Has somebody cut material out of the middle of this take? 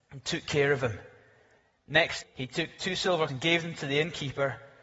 yes; 2 cuts; at 2.2 s, 3.3 s

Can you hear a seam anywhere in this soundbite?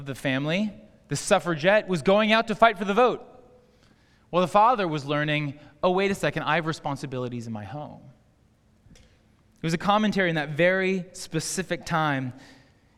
no; 0 cuts

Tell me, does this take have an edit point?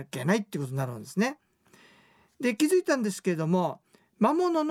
no; 0 cuts

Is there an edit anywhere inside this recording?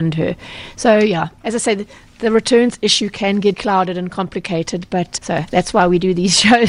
yes; 3 cuts; at 1.4 s, 3.5 s, 5.2 s

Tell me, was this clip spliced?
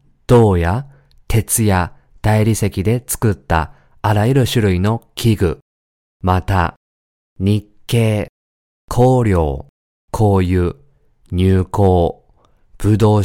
yes; 1 cut; at 9.9 s

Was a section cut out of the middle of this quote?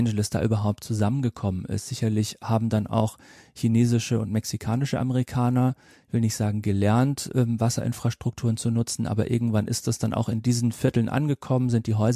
no; 0 cuts

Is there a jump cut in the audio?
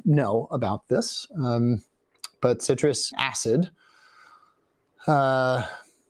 yes; 1 cut; at 3.1 s

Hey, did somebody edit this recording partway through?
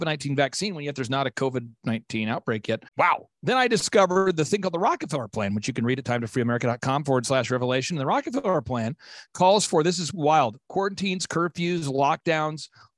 yes; 1 cut; at 2.9 s

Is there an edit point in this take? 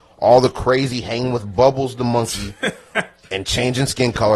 no; 0 cuts

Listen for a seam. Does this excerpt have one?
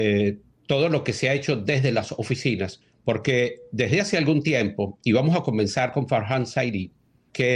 no; 0 cuts

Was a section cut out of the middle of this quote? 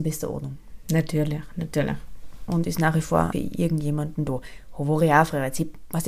yes; 1 cut; at 3.3 s

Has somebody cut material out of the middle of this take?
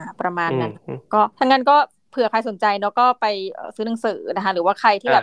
yes; 1 cut; at 1.3 s

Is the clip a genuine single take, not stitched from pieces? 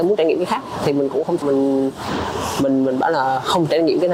no; 1 cut; at 1.4 s

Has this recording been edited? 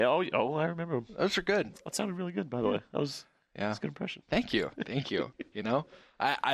no; 0 cuts

